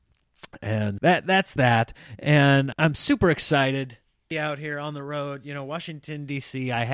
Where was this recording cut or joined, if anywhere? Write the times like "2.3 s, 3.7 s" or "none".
1.0 s, 2.7 s, 4.3 s

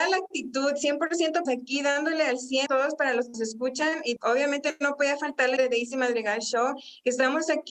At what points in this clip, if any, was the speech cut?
1.5 s, 2.7 s, 3.3 s, 4.2 s, 5.6 s

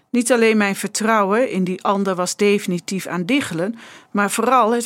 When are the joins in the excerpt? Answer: none

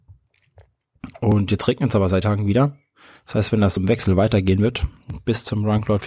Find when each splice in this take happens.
2.2 s, 3.8 s

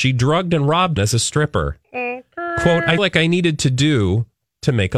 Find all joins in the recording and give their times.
1.0 s, 1.8 s, 3.0 s

